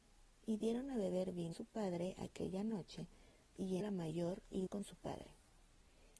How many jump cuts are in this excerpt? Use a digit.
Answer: 3